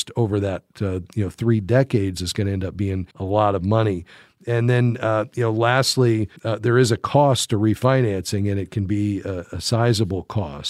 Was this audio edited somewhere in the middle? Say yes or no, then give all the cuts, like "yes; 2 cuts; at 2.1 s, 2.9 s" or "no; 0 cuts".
yes; 2 cuts; at 3.1 s, 6.4 s